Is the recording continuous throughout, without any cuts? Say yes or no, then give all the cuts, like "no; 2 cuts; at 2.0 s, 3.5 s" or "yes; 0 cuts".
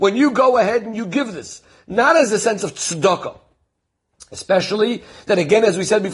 yes; 0 cuts